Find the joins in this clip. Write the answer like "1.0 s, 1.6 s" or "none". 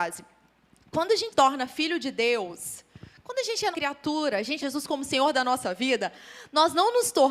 1.3 s, 3.7 s, 4.6 s

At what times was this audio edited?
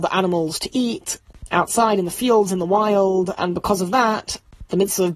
none

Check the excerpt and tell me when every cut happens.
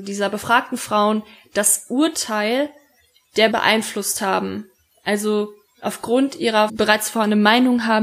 3.5 s, 5.7 s, 6.7 s

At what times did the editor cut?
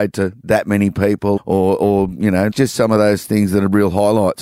1.4 s, 2.5 s

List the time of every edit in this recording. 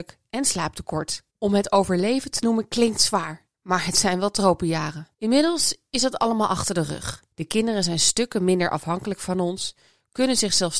1.3 s, 3.5 s, 5.1 s, 7.3 s

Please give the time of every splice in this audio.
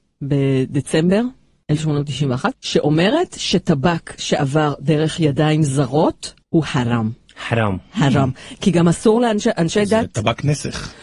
6.4 s

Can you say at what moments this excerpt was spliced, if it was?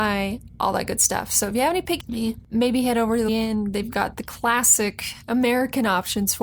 2.0 s, 3.3 s

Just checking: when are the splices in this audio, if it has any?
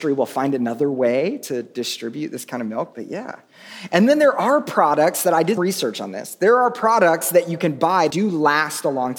2.9 s, 5.6 s, 8.1 s

